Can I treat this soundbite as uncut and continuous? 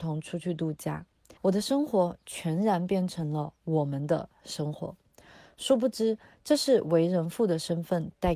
no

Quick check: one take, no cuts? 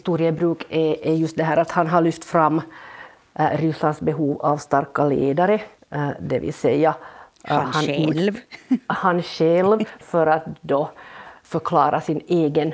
yes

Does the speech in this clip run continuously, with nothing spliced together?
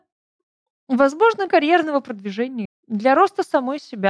no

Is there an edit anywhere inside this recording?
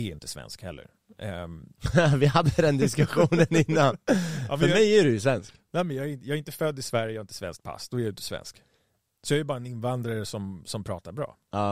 no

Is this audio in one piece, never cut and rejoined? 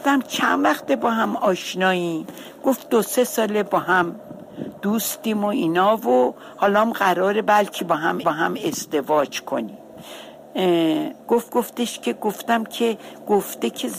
no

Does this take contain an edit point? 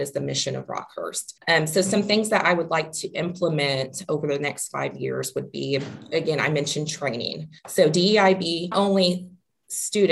yes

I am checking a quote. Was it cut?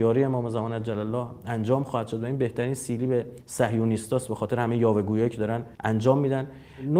yes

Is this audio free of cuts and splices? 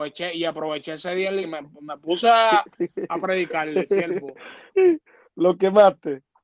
no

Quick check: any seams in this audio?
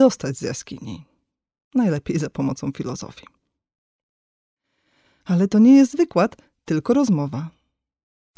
no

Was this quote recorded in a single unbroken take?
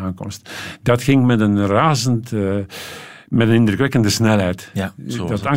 yes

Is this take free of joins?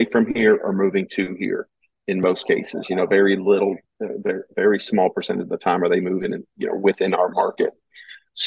yes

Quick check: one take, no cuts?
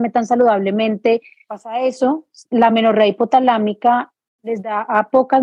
yes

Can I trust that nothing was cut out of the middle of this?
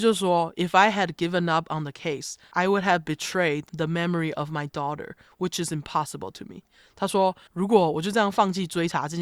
yes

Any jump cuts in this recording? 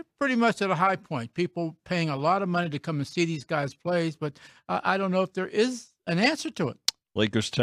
no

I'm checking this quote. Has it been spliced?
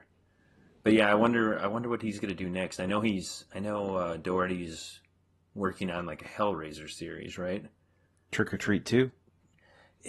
no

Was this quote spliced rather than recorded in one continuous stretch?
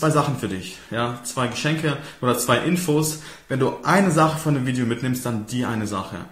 no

